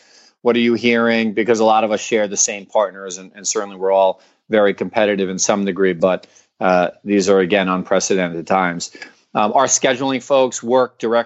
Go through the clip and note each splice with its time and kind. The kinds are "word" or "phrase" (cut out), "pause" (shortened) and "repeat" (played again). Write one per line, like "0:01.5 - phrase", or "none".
none